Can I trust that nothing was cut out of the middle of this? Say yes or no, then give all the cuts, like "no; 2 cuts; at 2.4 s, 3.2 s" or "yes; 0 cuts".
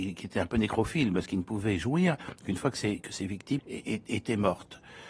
no; 1 cut; at 3.6 s